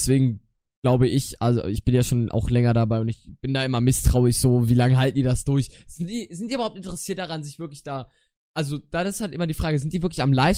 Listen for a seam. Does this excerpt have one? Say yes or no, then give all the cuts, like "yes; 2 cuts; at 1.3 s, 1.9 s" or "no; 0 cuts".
no; 0 cuts